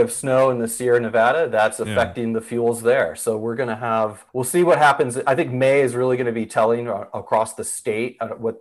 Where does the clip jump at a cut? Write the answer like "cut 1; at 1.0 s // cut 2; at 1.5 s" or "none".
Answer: cut 1; at 4.3 s